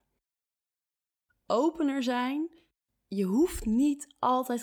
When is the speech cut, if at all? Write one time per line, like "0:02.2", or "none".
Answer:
none